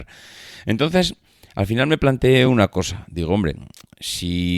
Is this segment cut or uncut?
uncut